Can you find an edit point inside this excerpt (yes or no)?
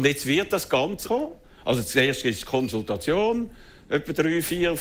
yes